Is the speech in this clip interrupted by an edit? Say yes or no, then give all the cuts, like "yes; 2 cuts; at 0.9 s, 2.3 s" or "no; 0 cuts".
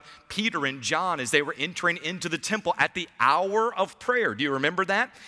no; 0 cuts